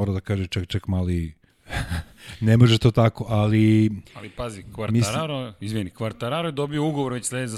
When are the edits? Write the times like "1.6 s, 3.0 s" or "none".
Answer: 1.5 s, 4.0 s